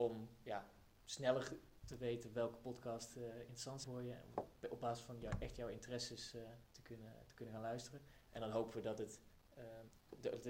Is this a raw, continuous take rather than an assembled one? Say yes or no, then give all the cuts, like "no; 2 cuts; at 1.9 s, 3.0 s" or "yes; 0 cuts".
no; 1 cut; at 3.8 s